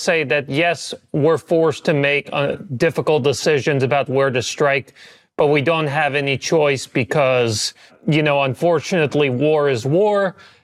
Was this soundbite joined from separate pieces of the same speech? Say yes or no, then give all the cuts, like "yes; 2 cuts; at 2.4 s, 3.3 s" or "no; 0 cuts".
no; 0 cuts